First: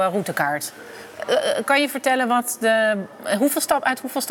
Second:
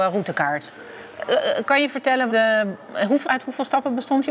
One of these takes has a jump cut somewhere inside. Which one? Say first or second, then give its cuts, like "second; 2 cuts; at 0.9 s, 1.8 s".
second; 2 cuts; at 2.3 s, 3.2 s